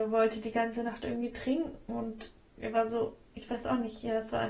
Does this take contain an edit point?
no; 0 cuts

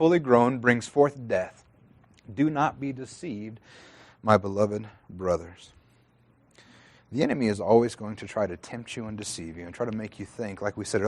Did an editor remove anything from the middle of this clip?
no; 0 cuts

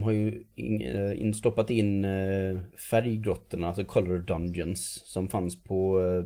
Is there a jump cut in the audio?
no; 0 cuts

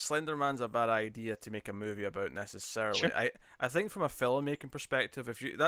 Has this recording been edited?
no; 0 cuts

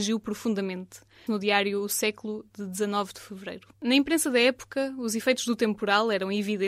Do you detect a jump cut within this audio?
yes; 2 cuts; at 1.3 s, 3.7 s

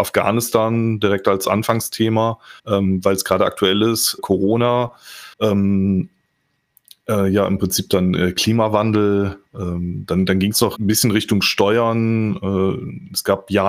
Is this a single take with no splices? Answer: no; 5 cuts; at 2.6 s, 4.2 s, 5.3 s, 9.5 s, 10.8 s

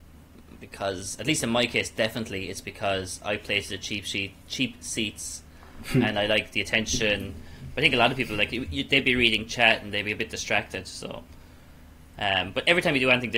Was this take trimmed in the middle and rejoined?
yes; 1 cut; at 4.4 s

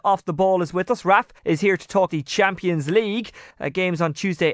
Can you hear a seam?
yes; 3 cuts; at 1.4 s, 2.1 s, 3.5 s

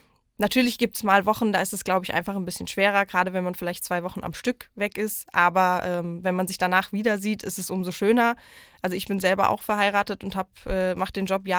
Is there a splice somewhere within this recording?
no; 0 cuts

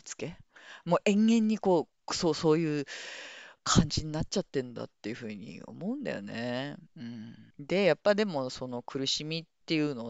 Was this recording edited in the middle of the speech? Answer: yes; 2 cuts; at 6.9 s, 7.5 s

